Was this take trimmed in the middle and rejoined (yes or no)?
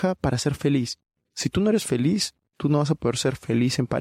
no